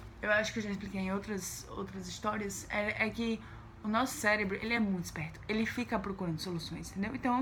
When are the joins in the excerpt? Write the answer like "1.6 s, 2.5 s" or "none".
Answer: none